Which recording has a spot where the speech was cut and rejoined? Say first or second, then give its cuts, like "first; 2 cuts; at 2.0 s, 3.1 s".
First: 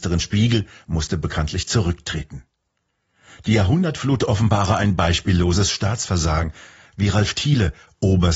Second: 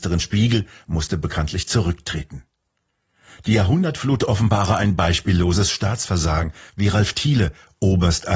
second; 1 cut; at 6.7 s